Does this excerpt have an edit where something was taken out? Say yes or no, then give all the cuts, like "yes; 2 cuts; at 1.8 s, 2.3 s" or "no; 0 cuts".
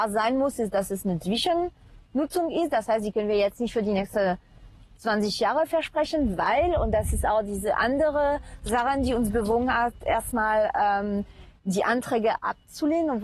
no; 0 cuts